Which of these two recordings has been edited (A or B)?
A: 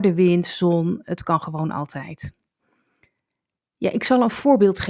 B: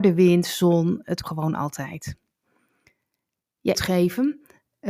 B